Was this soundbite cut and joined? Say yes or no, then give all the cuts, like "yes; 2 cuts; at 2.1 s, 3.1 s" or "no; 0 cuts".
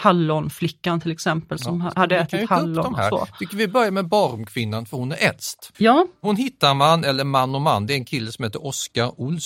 yes; 1 cut; at 5.7 s